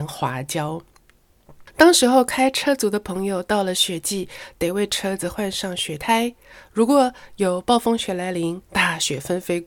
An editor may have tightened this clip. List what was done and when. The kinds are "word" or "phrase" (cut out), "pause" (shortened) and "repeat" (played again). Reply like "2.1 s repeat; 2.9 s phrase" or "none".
8.6 s pause